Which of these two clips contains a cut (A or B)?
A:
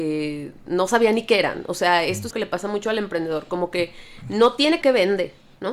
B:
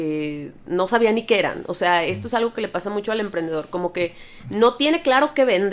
A